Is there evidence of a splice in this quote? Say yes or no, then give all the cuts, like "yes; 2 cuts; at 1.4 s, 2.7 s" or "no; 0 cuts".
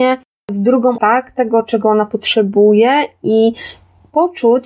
yes; 1 cut; at 1.0 s